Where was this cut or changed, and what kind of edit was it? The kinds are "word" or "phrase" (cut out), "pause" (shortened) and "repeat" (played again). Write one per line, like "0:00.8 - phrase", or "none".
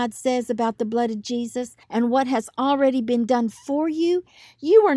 0:01.8 - pause